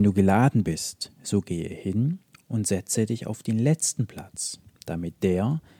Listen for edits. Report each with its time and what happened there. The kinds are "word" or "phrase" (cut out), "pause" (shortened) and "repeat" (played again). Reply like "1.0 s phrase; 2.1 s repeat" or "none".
none